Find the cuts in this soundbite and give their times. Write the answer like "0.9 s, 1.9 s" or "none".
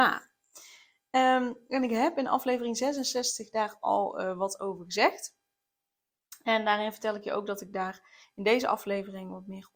none